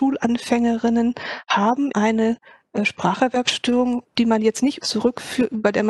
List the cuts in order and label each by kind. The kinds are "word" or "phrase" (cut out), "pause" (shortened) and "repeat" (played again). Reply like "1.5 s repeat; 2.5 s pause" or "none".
1.9 s word; 4.1 s word; 4.8 s word

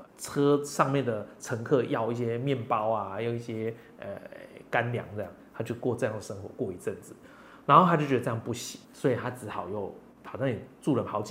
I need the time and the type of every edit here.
8.8 s pause

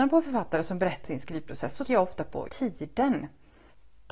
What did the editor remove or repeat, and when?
1.0 s word; 1.9 s word; 2.5 s word

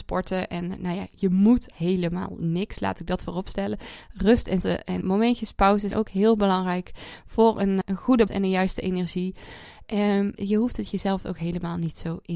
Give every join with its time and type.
1.7 s word; 4.6 s word; 5.0 s word; 5.9 s word; 7.8 s word; 8.3 s word; 10.4 s word

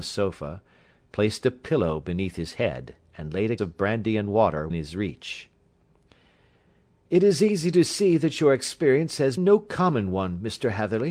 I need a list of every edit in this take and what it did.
3.6 s word; 4.7 s word; 9.4 s word

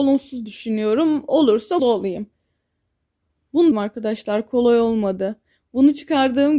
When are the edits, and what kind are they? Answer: 1.8 s word; 3.7 s phrase

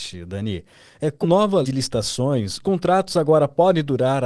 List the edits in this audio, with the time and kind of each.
1.2 s word; 1.6 s word; 2.6 s word

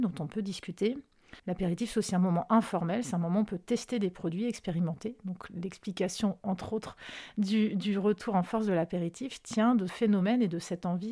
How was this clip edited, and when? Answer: 1.4 s pause; 9.9 s word

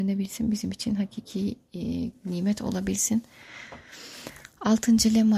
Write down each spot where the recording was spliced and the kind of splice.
none

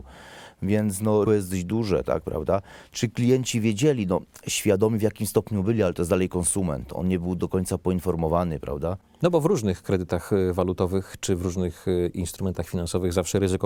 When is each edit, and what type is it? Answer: 1.3 s word

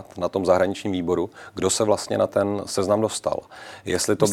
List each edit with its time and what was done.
none

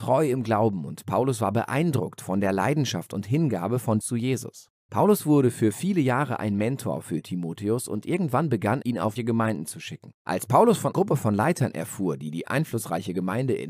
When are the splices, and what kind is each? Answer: 4.0 s word; 4.7 s pause; 8.8 s word; 9.2 s phrase; 10.9 s word

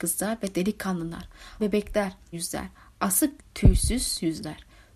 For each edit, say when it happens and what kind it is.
1.6 s word; 2.3 s word; 3.4 s word

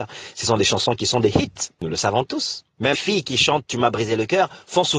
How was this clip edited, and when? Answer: 2.9 s word

